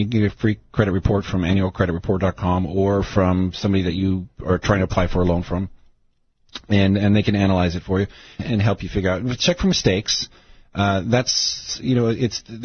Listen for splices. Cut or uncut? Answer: cut